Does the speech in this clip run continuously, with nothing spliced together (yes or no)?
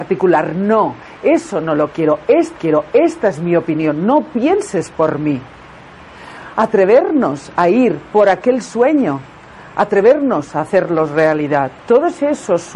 no